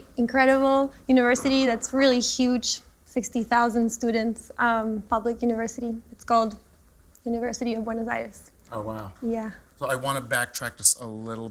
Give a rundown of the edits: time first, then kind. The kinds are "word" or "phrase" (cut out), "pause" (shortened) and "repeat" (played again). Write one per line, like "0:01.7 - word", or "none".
none